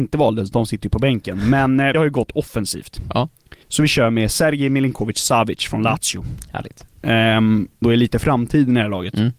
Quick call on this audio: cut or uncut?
cut